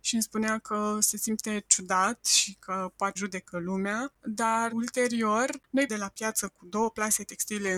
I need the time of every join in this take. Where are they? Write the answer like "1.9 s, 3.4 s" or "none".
3.2 s, 4.7 s, 5.9 s